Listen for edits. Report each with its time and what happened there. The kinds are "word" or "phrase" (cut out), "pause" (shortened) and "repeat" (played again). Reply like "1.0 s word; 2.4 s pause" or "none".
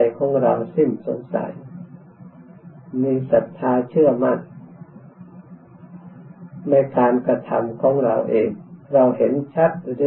8.8 s pause